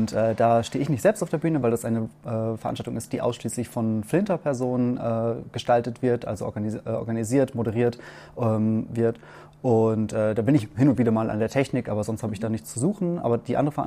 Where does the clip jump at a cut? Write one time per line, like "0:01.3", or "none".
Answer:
none